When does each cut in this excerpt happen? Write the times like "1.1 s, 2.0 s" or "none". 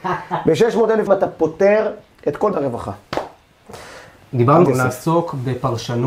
1.1 s, 2.5 s, 4.7 s